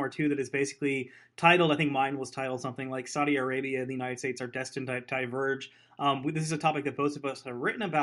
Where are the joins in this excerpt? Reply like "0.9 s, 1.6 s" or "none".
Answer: none